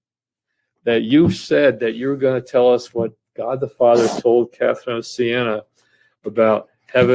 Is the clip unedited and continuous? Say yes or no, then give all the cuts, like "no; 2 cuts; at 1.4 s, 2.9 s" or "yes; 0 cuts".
yes; 0 cuts